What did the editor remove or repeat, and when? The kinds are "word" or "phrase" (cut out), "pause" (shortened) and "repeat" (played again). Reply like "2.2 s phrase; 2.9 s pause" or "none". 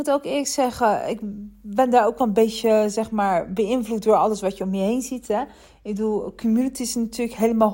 none